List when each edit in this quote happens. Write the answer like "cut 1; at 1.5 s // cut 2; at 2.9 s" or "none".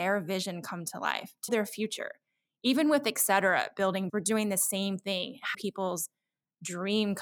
cut 1; at 1.5 s // cut 2; at 4.1 s // cut 3; at 5.5 s